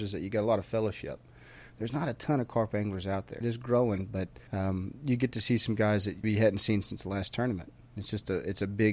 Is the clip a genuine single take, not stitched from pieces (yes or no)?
no